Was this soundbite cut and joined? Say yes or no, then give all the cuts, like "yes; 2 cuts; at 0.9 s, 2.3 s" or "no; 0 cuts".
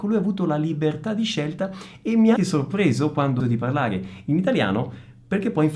yes; 2 cuts; at 2.4 s, 3.4 s